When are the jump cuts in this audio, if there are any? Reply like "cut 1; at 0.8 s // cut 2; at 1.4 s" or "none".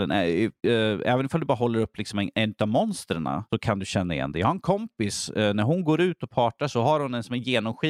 none